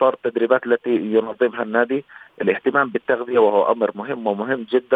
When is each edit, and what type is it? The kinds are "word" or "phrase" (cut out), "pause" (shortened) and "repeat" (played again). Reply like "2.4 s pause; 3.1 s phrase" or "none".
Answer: none

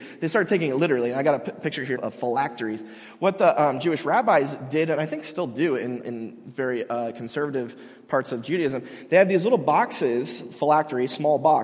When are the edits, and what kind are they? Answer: 1.9 s word; 6.0 s word

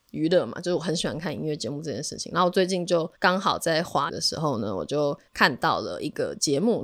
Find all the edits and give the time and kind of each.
3.2 s pause; 4.1 s word; 5.3 s pause

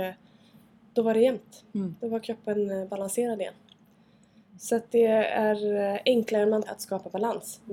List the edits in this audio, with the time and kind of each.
6.6 s word

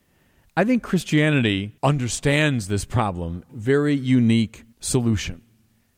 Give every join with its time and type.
1.8 s pause; 3.5 s phrase; 4.7 s pause

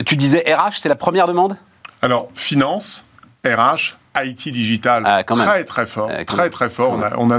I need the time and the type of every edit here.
none

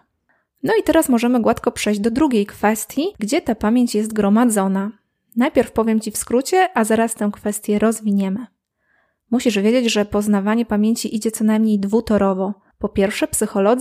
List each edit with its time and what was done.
3.2 s word

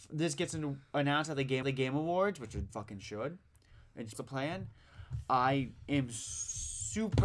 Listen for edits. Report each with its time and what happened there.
1.6 s repeat; 2.7 s word; 4.1 s phrase

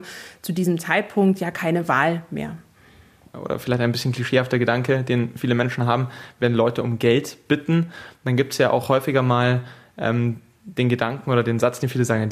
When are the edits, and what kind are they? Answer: none

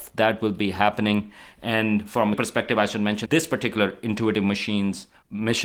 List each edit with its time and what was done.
2.3 s word; 3.3 s word

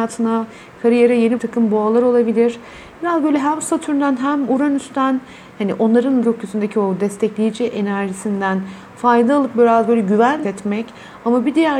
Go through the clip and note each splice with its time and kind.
1.4 s word; 6.2 s word; 10.4 s word

